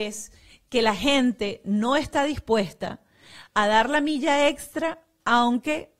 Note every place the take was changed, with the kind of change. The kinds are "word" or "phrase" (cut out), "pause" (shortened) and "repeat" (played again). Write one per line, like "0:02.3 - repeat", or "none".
none